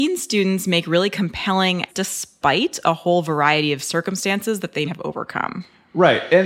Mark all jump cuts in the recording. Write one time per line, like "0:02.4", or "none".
0:01.9
0:04.9